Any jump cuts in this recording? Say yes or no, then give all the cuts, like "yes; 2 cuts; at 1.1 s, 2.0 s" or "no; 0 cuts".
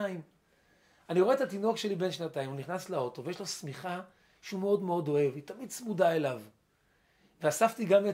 no; 0 cuts